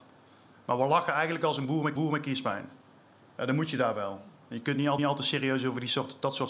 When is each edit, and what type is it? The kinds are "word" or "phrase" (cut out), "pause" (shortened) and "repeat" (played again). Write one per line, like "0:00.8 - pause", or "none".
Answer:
0:02.0 - repeat
0:05.0 - repeat